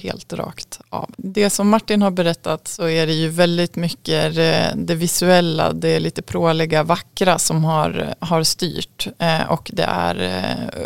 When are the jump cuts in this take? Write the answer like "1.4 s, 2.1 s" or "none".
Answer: 1.1 s